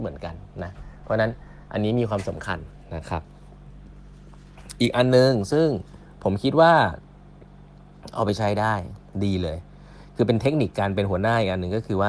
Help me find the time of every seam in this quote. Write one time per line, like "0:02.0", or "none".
0:06.1